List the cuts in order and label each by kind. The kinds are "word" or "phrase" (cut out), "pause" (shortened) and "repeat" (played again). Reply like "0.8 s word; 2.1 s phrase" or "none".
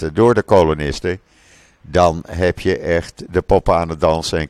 none